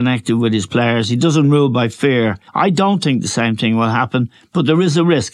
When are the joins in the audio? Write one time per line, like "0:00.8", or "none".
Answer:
0:02.5